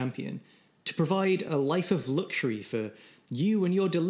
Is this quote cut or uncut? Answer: uncut